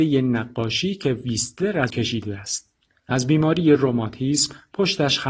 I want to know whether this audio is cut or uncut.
cut